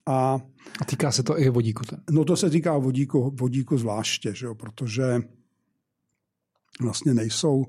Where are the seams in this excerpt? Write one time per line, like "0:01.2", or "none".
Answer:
none